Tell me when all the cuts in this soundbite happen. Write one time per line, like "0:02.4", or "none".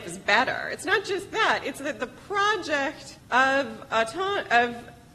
0:03.2